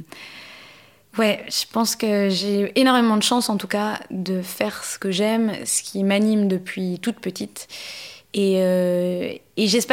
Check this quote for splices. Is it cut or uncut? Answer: uncut